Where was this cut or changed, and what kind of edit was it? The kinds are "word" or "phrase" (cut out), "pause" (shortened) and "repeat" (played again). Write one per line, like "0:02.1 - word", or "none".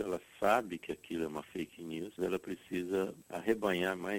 0:02.2 - word